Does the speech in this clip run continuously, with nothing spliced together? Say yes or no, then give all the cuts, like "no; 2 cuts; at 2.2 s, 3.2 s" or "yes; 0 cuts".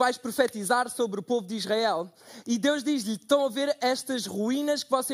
yes; 0 cuts